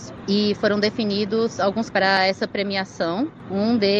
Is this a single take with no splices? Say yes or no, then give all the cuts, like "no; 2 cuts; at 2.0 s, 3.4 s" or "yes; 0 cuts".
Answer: no; 1 cut; at 1.9 s